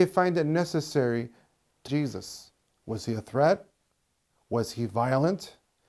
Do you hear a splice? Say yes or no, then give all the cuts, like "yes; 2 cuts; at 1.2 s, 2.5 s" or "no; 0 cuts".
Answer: yes; 1 cut; at 1.9 s